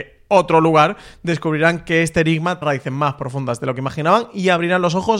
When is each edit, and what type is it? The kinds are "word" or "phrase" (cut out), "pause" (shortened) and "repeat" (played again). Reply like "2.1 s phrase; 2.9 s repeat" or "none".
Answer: 2.6 s word